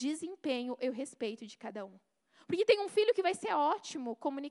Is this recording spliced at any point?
no; 0 cuts

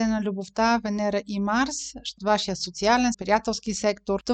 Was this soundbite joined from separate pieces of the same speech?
yes; 2 cuts; at 2.2 s, 3.1 s

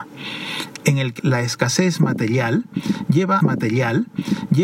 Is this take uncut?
no; 2 cuts; at 1.2 s, 3.4 s

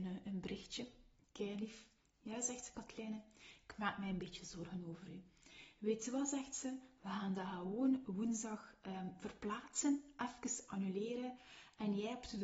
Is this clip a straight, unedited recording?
yes; 0 cuts

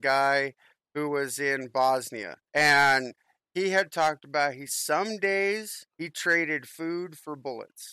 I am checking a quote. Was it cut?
yes; 3 cuts; at 2.5 s, 4.7 s, 5.9 s

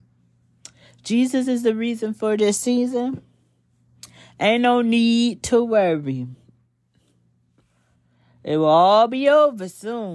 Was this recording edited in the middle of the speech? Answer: no; 0 cuts

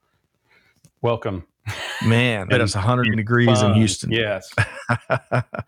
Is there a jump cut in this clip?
yes; 2 cuts; at 2.5 s, 3.1 s

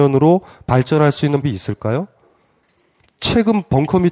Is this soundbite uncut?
no; 1 cut; at 1.4 s

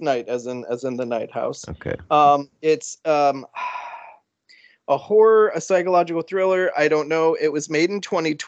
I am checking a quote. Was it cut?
no; 0 cuts

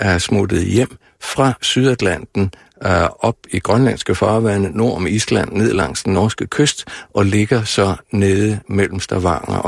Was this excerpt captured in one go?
yes; 0 cuts

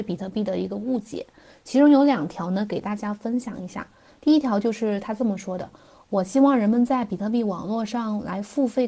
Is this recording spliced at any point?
no; 0 cuts

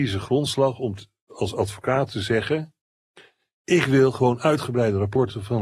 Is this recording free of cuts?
yes; 0 cuts

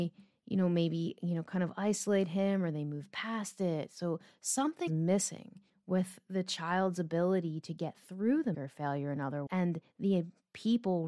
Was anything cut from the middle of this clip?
yes; 4 cuts; at 4.9 s, 5.7 s, 8.5 s, 9.5 s

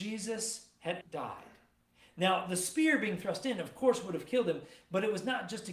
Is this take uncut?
no; 2 cuts; at 1.0 s, 1.9 s

